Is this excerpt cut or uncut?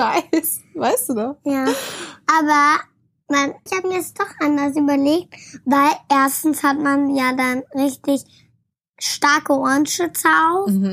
cut